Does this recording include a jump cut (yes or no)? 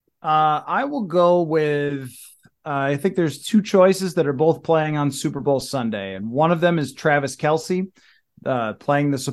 no